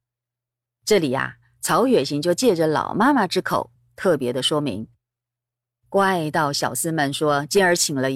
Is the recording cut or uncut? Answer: uncut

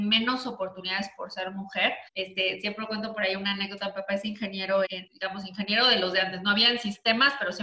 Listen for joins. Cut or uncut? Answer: cut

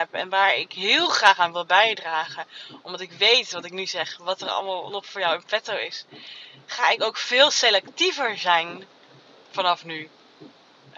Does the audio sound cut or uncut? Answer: uncut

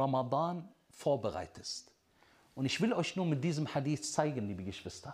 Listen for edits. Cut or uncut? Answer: uncut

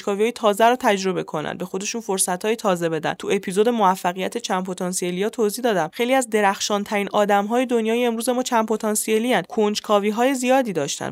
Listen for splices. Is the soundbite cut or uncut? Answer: uncut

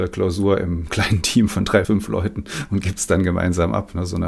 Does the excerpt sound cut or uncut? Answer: cut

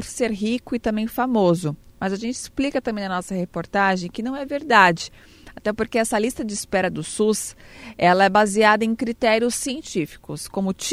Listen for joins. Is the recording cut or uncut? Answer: uncut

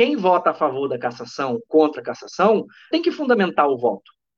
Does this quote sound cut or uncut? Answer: cut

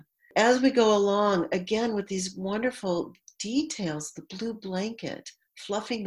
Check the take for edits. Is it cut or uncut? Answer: uncut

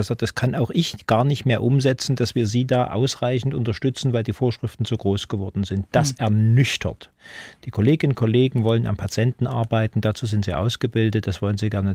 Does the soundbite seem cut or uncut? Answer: uncut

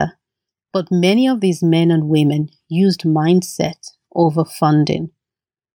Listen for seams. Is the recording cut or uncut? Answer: uncut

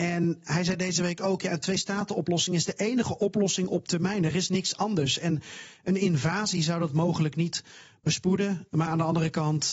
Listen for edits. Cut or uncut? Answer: uncut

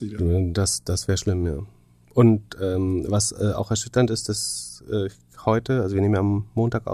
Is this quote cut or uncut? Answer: uncut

